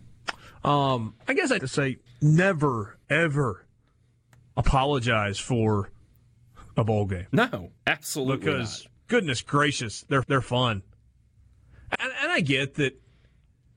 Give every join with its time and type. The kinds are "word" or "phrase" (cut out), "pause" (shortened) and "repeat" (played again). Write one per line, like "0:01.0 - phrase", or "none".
0:01.6 - phrase
0:02.1 - word
0:03.0 - word
0:06.7 - pause
0:07.8 - pause
0:09.0 - pause
0:10.2 - repeat
0:11.9 - word